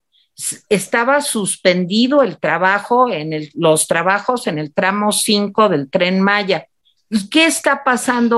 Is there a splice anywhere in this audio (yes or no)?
no